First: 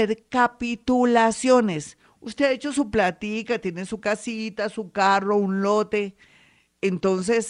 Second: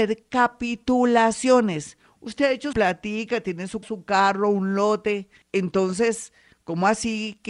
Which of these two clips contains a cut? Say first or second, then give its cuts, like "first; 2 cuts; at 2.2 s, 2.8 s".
second; 3 cuts; at 2.7 s, 3.8 s, 5.4 s